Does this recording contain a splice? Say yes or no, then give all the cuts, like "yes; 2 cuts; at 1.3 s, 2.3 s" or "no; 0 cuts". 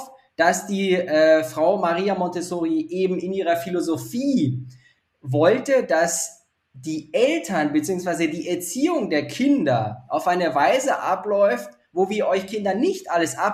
no; 0 cuts